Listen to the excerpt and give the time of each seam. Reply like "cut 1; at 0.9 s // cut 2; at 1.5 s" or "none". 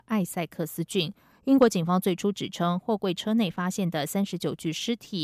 none